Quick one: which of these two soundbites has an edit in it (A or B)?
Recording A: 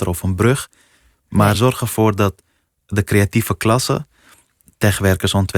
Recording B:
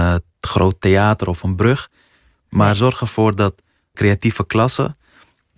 B